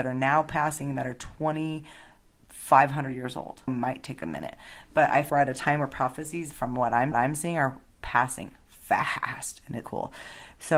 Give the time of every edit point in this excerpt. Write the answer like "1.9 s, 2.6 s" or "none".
3.7 s, 5.3 s, 7.1 s, 9.8 s